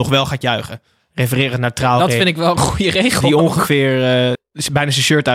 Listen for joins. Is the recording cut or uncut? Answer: cut